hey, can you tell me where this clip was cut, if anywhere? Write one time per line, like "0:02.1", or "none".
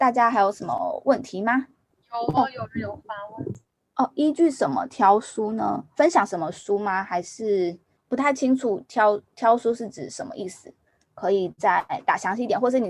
none